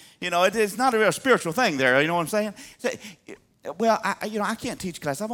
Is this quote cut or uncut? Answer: uncut